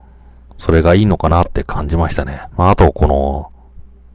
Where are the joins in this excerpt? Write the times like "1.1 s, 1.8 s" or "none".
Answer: 2.5 s